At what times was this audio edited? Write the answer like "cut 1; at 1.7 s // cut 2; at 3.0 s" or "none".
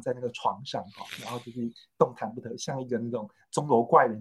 none